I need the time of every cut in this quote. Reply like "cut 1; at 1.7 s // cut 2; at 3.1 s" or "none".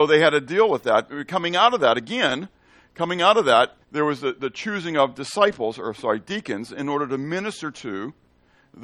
cut 1; at 3.8 s